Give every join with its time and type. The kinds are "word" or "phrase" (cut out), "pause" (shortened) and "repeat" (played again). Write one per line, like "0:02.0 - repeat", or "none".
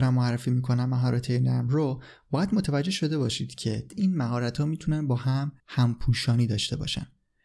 0:03.9 - word
0:05.6 - pause